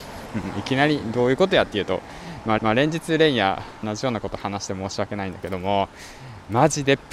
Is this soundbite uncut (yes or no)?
no